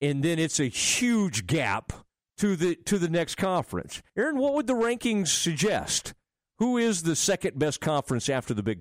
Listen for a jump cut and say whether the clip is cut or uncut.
cut